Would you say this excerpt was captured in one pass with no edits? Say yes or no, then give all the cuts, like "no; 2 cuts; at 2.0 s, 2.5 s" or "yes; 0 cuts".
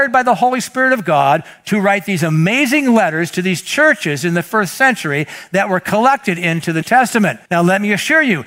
no; 2 cuts; at 6.8 s, 7.5 s